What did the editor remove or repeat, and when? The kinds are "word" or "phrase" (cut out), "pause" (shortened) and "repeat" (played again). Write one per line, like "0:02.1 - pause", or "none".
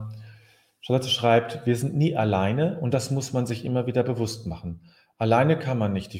none